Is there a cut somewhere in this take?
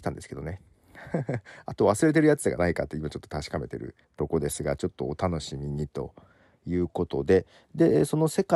yes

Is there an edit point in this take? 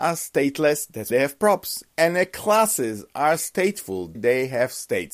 yes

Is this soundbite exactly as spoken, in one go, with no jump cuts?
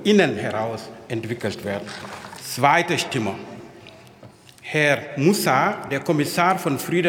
yes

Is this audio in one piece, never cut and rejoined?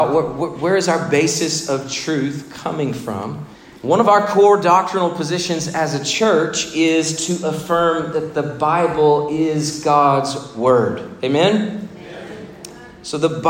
no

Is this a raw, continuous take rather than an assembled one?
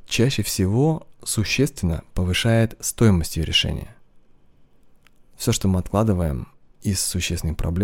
yes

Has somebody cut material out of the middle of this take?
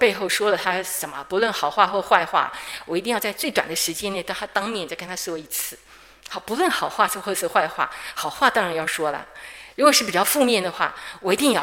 no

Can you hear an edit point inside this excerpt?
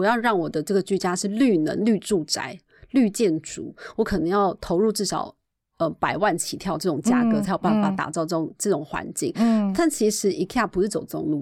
no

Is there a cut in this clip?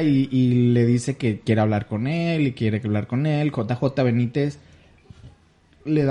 no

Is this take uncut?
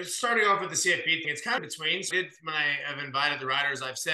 no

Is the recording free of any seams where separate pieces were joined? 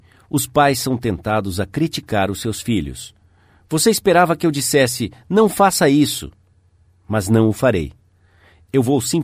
yes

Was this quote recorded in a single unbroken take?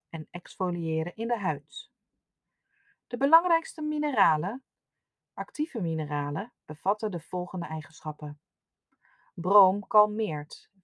yes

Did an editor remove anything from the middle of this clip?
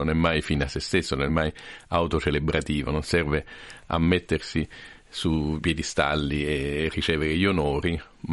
yes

